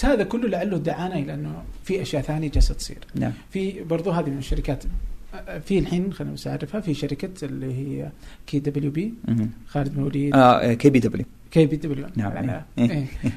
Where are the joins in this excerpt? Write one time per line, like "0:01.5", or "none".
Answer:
none